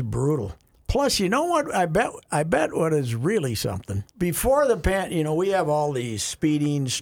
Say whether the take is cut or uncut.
cut